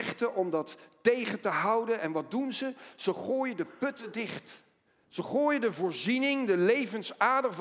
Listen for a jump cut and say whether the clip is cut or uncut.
cut